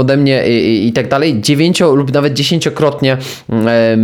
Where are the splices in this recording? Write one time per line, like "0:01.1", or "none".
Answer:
none